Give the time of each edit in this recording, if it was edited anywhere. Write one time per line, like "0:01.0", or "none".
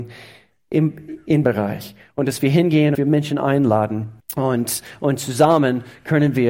0:01.4
0:02.9
0:04.2